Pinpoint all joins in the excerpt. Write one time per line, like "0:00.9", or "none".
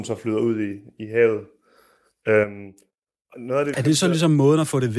0:03.3
0:03.7